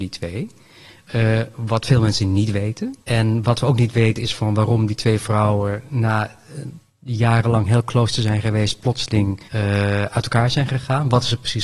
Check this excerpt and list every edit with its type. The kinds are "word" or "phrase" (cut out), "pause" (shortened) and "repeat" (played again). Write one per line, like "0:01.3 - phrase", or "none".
0:03.0 - pause
0:09.5 - pause